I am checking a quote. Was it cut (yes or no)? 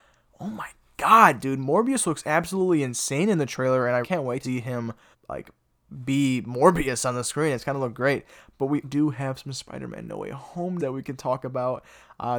yes